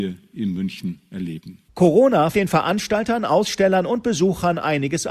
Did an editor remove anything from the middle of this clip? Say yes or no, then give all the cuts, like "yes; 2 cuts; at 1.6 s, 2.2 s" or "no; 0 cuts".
yes; 1 cut; at 2.3 s